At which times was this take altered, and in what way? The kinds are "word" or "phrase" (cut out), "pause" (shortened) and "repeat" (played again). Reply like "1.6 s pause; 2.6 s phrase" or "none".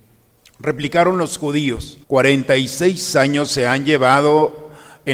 2.0 s pause